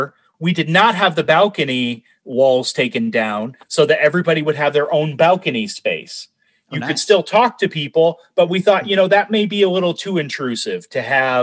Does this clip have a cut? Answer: no; 0 cuts

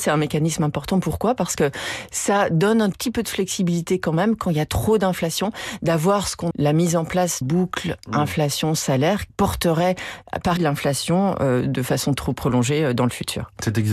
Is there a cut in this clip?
yes; 6 cuts; at 2.9 s, 6.5 s, 7.4 s, 9.3 s, 10.6 s, 12.1 s

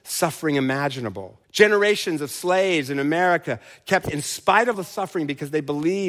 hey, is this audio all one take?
no; 3 cuts; at 1.4 s, 4.0 s, 4.7 s

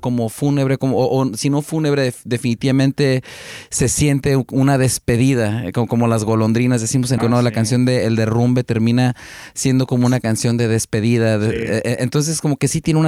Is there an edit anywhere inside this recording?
yes; 1 cut; at 7.2 s

